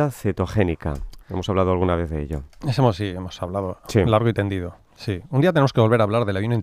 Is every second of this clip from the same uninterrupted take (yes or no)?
no